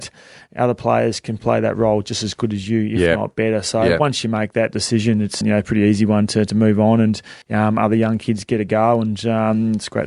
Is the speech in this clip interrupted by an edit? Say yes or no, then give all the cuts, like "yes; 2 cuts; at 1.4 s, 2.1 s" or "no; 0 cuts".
yes; 3 cuts; at 1.4 s, 5.4 s, 7.4 s